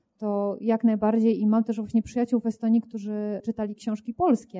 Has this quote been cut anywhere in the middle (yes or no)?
no